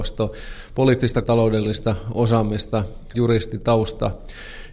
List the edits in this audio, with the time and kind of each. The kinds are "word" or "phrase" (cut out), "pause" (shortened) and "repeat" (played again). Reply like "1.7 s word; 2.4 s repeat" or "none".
1.2 s word; 3.1 s word

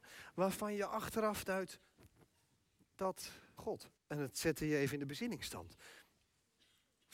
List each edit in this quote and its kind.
3.6 s phrase; 4.0 s pause

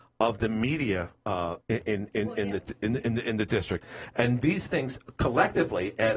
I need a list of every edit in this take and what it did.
1.6 s word

